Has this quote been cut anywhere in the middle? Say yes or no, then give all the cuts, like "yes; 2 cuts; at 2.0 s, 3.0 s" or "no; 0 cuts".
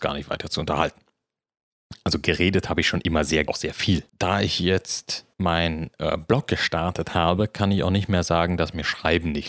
yes; 3 cuts; at 3.5 s, 4.1 s, 5.3 s